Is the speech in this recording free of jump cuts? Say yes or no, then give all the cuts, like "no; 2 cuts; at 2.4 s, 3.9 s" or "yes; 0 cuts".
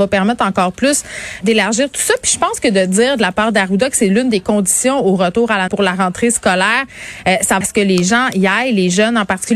no; 3 cuts; at 1.4 s, 5.7 s, 7.6 s